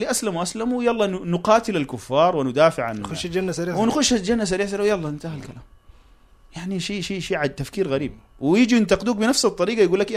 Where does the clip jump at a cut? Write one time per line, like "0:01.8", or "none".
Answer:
none